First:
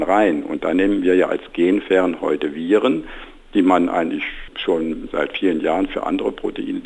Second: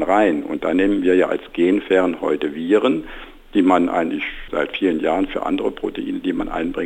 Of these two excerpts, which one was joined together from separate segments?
second; 1 cut; at 4.5 s

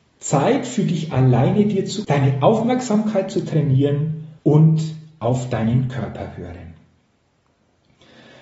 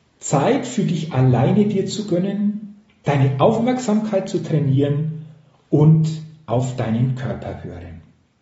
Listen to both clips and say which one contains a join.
first; 2 cuts; at 2.0 s, 4.4 s

